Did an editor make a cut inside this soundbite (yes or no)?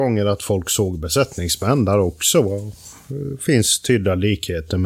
no